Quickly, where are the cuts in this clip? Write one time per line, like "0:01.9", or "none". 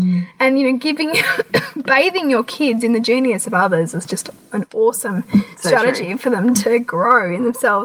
none